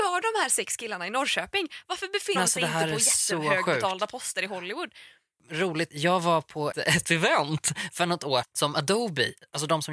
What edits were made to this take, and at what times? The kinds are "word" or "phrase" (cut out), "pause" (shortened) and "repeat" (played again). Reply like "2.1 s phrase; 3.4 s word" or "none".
2.4 s word; 5.9 s word; 6.7 s word; 8.4 s word